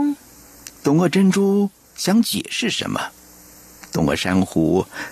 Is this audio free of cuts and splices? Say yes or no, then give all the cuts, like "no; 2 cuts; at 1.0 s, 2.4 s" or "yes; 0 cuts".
yes; 0 cuts